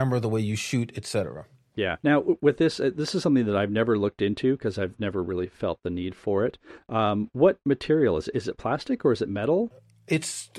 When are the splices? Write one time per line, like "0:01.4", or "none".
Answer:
0:02.0